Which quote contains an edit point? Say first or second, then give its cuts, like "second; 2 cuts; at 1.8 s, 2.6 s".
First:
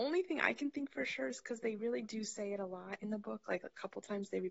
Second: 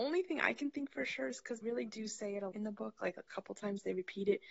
second; 2 cuts; at 1.6 s, 2.5 s